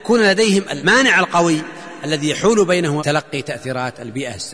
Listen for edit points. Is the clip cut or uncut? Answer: cut